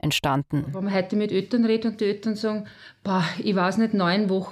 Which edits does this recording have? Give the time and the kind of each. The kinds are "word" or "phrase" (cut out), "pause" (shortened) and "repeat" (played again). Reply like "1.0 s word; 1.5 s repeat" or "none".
none